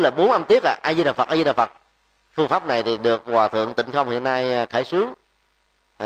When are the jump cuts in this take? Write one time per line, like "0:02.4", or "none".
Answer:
none